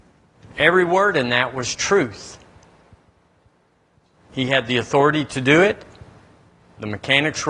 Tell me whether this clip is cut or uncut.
uncut